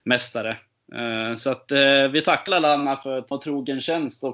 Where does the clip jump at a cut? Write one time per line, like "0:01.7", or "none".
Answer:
0:02.5
0:03.3